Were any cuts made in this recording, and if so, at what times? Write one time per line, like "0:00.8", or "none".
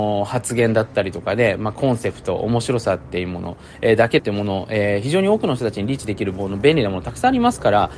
0:04.2